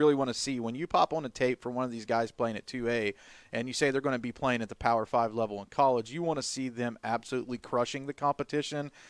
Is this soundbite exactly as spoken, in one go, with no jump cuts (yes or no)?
yes